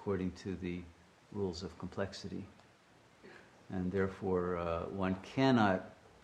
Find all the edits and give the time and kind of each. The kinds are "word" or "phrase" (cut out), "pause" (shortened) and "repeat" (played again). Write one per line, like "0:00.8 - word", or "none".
none